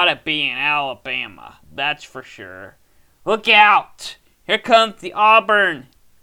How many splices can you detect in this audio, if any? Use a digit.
1